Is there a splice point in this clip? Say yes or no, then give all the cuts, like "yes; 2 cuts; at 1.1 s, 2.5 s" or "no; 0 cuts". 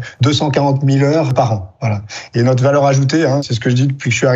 no; 0 cuts